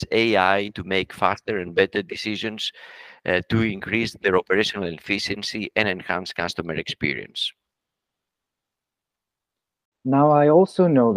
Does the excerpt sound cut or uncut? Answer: uncut